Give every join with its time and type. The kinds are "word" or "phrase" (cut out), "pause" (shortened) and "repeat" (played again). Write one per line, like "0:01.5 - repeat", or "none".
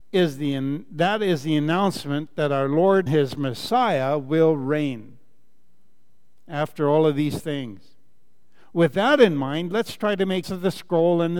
0:03.1 - word
0:10.4 - word